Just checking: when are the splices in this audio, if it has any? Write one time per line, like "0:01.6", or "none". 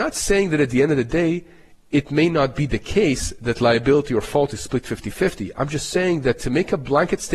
none